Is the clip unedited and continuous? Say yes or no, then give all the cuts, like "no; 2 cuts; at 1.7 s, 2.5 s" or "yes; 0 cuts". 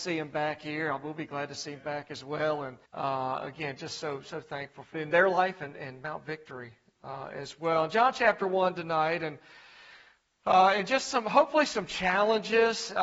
no; 2 cuts; at 2.8 s, 4.9 s